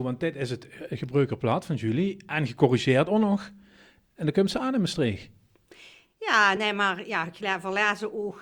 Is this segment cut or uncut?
uncut